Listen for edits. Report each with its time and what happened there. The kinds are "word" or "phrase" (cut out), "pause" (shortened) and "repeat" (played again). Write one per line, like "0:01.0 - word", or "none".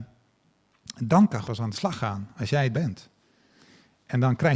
0:01.4 - word
0:02.7 - word